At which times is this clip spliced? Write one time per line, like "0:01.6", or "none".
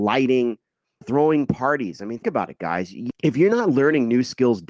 0:01.0
0:02.2
0:03.1